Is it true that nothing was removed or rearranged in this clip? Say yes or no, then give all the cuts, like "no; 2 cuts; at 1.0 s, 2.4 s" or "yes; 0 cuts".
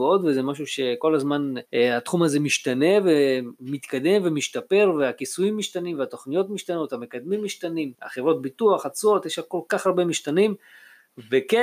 no; 2 cuts; at 1.6 s, 7.9 s